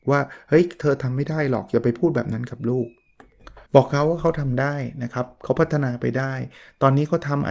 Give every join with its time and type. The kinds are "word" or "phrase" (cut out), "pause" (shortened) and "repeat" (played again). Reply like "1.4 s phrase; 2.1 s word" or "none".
3.7 s pause